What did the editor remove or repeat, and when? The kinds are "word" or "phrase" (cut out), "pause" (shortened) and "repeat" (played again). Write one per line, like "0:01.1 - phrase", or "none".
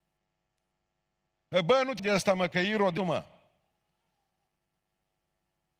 0:02.0 - word
0:03.0 - word